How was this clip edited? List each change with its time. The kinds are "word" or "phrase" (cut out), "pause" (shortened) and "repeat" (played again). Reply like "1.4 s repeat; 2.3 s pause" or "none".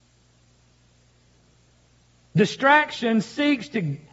none